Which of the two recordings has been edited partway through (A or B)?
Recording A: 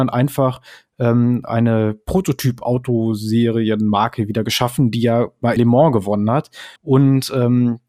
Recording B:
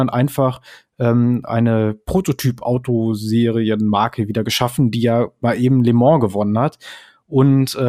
A